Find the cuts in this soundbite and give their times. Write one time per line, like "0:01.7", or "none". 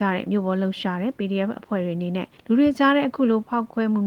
0:02.4